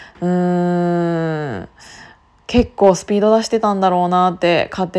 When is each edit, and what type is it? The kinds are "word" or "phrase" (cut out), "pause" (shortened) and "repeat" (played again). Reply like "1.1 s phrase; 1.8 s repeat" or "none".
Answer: none